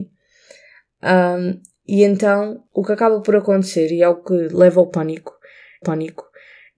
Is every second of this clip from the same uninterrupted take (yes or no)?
no